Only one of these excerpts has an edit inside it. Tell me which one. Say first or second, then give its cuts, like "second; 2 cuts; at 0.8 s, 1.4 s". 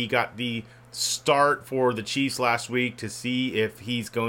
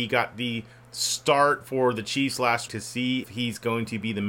second; 2 cuts; at 2.7 s, 3.2 s